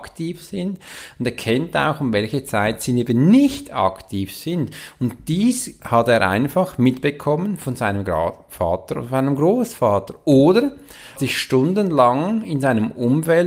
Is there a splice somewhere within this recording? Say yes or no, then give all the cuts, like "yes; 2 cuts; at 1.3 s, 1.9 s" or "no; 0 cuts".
yes; 1 cut; at 11.2 s